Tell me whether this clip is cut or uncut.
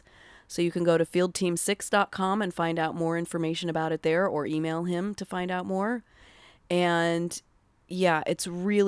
uncut